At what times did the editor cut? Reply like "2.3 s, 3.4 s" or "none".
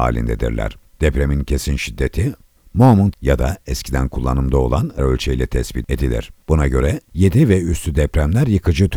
3.1 s, 5.0 s